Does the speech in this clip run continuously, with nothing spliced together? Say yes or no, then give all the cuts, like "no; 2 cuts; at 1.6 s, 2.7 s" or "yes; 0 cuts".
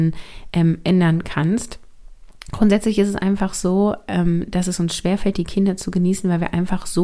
yes; 0 cuts